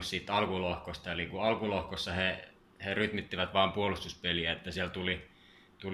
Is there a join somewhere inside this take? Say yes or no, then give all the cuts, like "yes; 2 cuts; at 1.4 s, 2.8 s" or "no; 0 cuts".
no; 0 cuts